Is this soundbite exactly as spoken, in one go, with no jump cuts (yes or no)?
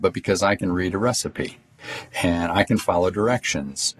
yes